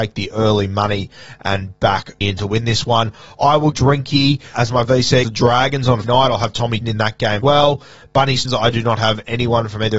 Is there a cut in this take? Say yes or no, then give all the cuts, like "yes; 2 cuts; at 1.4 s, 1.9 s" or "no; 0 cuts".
yes; 8 cuts; at 2.2 s, 3.7 s, 4.5 s, 5.2 s, 6.0 s, 6.8 s, 7.4 s, 8.4 s